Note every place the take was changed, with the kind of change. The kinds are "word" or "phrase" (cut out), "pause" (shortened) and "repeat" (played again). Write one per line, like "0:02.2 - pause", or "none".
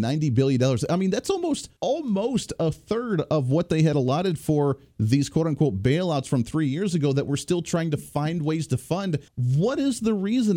0:01.8 - pause
0:09.3 - pause